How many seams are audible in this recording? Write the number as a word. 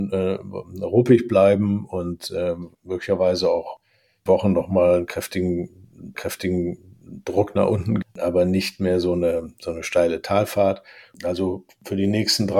four